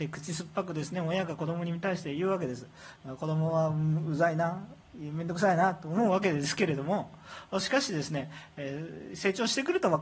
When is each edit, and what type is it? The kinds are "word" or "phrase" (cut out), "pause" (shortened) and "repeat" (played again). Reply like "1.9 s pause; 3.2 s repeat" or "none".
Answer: 3.0 s pause; 4.8 s pause